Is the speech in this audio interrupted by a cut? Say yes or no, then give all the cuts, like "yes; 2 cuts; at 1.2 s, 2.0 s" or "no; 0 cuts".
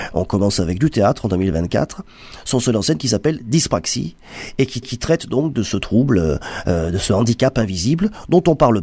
yes; 1 cut; at 4.8 s